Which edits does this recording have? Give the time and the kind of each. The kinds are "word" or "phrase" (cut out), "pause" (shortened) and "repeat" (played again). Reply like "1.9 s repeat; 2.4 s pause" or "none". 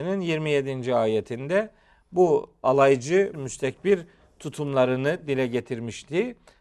3.3 s word